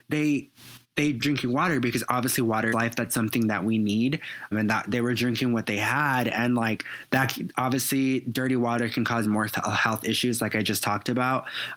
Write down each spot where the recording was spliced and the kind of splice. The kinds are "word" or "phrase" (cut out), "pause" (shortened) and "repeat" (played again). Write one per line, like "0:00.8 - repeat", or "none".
0:01.2 - word
0:02.7 - word
0:04.5 - word
0:09.2 - word